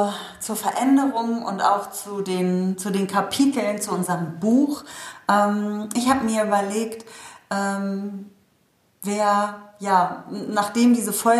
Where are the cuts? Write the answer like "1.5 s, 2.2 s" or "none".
none